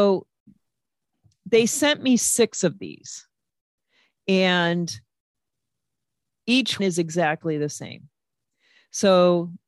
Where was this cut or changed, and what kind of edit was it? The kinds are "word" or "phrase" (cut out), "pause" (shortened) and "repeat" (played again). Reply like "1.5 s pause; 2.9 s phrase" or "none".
6.8 s word